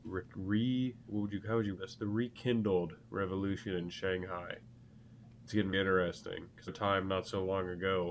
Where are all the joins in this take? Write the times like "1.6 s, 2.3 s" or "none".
1.1 s, 1.8 s, 3.0 s, 5.7 s, 6.7 s